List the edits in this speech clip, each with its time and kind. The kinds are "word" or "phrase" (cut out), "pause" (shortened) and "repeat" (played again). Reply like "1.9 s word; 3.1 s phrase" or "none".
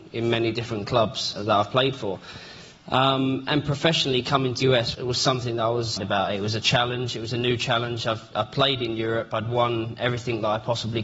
1.4 s word; 4.6 s word; 4.9 s word; 6.0 s word

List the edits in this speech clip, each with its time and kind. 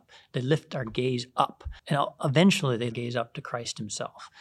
1.8 s pause; 2.9 s phrase

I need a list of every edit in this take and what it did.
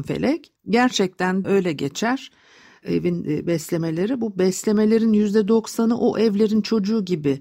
1.4 s phrase

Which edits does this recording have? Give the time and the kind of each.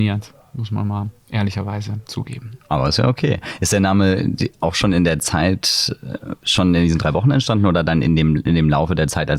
2.6 s pause

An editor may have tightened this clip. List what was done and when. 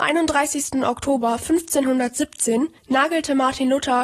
2.8 s pause

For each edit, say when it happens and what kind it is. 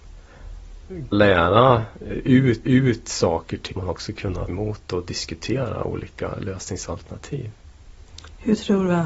1.1 s word; 2.6 s repeat; 3.8 s word; 4.5 s word

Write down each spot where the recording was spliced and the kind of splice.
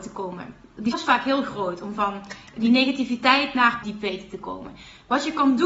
0.9 s word; 3.8 s phrase

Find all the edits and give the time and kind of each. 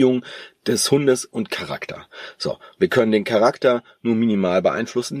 none

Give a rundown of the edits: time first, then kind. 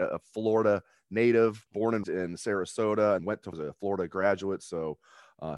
1.7 s pause; 2.0 s word; 3.2 s word; 3.5 s word

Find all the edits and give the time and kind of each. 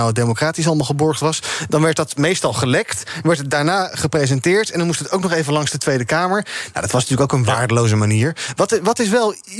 none

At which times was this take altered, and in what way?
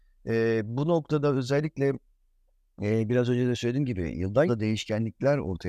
4.5 s word

